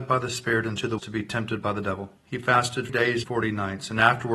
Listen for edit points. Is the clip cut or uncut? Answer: cut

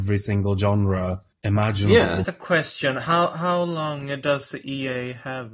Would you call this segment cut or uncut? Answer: cut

